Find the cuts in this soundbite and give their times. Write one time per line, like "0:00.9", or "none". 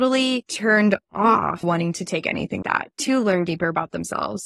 0:01.6
0:02.6